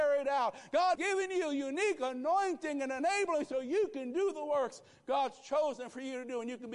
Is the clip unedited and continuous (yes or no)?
no